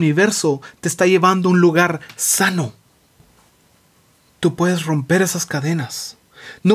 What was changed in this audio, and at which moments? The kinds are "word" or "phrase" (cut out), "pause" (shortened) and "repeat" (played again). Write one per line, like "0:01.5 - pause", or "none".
none